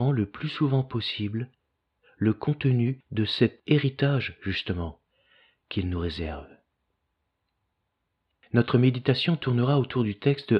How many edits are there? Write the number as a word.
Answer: zero